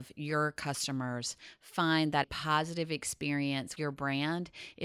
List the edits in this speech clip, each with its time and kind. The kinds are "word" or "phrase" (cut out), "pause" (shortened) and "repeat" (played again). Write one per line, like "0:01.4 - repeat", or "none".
0:02.2 - word
0:03.8 - word